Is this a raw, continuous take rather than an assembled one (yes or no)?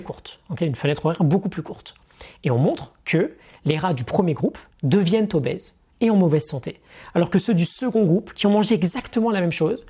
no